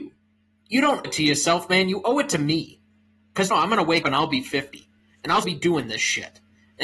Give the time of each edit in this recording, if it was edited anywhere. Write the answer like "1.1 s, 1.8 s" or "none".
1.0 s, 3.5 s, 4.0 s, 5.4 s